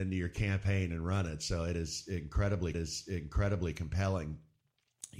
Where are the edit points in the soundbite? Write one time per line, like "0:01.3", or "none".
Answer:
0:02.7